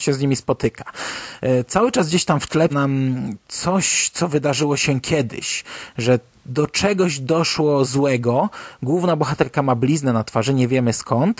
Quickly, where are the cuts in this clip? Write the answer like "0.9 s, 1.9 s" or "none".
2.7 s